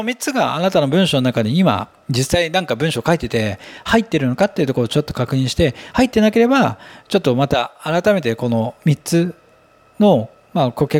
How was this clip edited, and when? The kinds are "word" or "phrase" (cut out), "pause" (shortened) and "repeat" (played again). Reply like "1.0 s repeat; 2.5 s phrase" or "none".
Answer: none